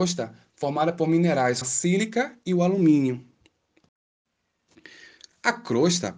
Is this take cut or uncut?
cut